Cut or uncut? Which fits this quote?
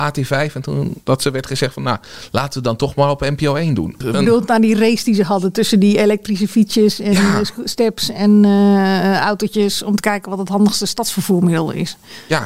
cut